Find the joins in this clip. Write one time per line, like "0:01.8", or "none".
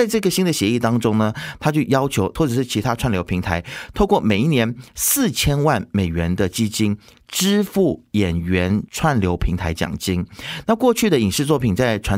0:02.4